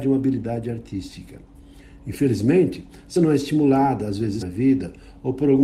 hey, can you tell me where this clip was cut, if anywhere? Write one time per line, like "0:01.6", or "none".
0:03.2
0:04.4